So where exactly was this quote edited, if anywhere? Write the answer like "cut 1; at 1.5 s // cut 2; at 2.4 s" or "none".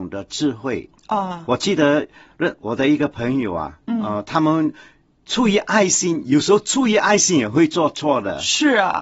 none